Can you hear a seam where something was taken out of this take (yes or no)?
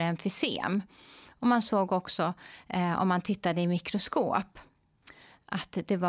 no